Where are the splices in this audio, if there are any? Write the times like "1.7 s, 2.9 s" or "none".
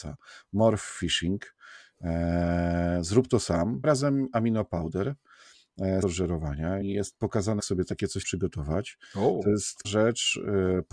3.8 s, 6.0 s, 6.8 s, 7.6 s, 8.2 s, 9.8 s